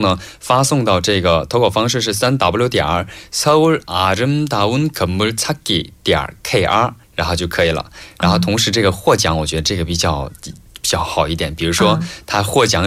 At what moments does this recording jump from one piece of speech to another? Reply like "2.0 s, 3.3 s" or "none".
7.0 s, 10.4 s